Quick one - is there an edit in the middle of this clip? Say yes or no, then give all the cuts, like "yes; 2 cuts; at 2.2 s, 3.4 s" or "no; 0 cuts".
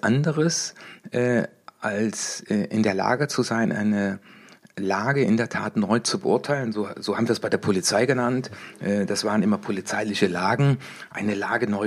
no; 0 cuts